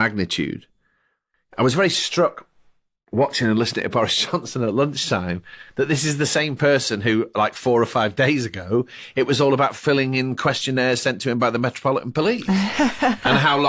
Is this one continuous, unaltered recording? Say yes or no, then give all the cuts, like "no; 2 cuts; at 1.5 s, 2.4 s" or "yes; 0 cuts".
yes; 0 cuts